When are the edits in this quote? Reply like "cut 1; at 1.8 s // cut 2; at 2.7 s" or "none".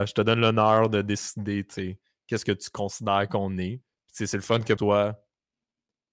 cut 1; at 4.8 s

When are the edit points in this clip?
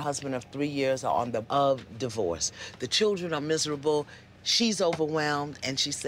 cut 1; at 1.4 s

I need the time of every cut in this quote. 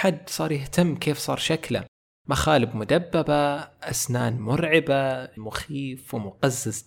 cut 1; at 5.4 s

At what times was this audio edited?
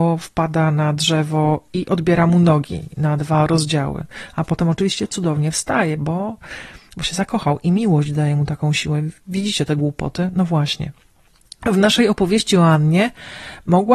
none

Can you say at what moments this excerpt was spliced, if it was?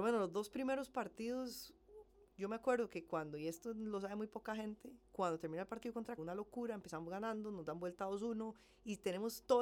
cut 1; at 6.2 s

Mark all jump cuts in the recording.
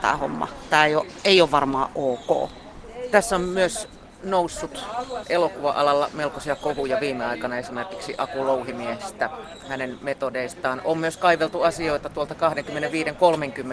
none

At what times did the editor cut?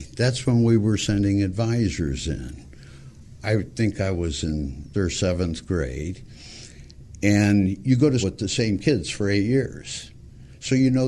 cut 1; at 4.9 s // cut 2; at 8.2 s

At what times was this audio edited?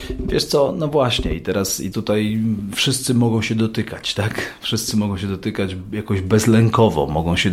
cut 1; at 1.9 s

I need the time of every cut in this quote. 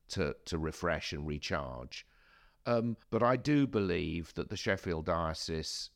cut 1; at 3.0 s

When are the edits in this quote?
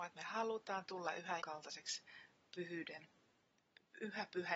cut 1; at 1.4 s

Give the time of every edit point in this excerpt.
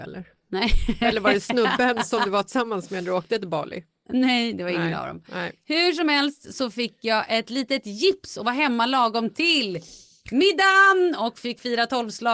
none

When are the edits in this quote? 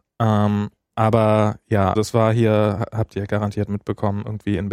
cut 1; at 0.9 s // cut 2; at 1.9 s

